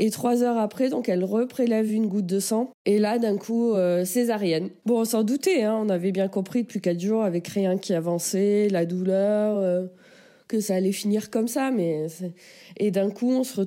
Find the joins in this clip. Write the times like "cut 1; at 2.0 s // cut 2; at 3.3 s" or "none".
none

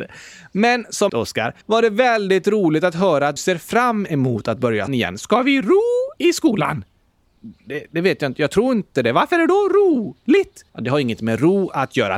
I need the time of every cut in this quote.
cut 1; at 1.1 s // cut 2; at 1.6 s // cut 3; at 3.4 s // cut 4; at 4.9 s // cut 5; at 6.2 s // cut 6; at 10.7 s

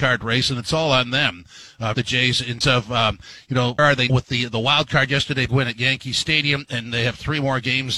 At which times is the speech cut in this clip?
cut 1; at 1.9 s // cut 2; at 2.6 s // cut 3; at 3.8 s // cut 4; at 4.1 s // cut 5; at 5.5 s

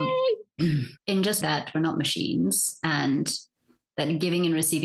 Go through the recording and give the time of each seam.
cut 1; at 1.4 s

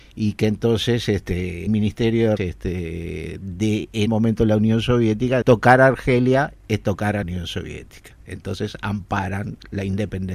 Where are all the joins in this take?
cut 1; at 1.7 s // cut 2; at 2.4 s // cut 3; at 3.4 s // cut 4; at 4.1 s // cut 5; at 5.4 s // cut 6; at 7.2 s

